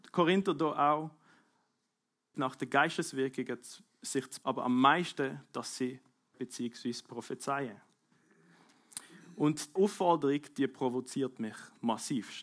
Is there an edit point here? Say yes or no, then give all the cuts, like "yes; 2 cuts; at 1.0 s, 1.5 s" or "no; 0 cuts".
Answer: yes; 4 cuts; at 2.3 s, 4.4 s, 6.3 s, 9.8 s